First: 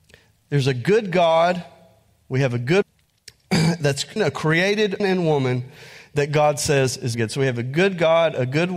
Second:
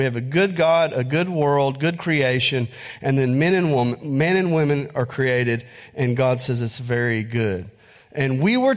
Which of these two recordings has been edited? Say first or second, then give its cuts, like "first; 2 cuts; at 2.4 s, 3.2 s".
first; 4 cuts; at 2.8 s, 4.2 s, 5.0 s, 7.1 s